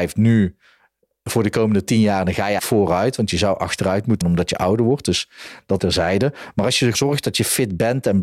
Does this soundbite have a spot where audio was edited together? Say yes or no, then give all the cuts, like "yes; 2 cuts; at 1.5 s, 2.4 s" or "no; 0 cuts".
yes; 4 cuts; at 2.6 s, 4.2 s, 5.8 s, 6.9 s